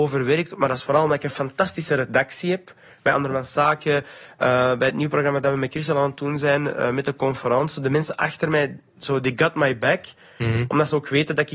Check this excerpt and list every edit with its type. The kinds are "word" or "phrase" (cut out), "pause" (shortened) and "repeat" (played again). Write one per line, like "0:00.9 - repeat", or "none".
none